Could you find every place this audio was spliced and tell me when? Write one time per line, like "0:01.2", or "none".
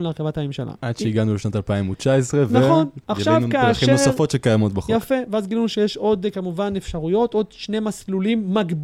0:03.0